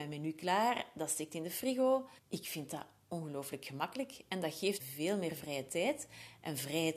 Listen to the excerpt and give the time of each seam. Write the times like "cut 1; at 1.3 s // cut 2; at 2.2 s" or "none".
cut 1; at 2.2 s // cut 2; at 4.8 s